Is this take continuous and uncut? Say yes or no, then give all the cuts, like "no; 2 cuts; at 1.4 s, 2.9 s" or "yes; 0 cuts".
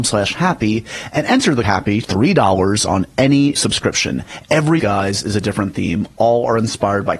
no; 4 cuts; at 1.6 s, 2.0 s, 3.6 s, 4.8 s